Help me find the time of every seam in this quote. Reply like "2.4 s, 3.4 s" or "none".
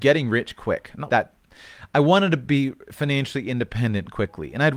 1.1 s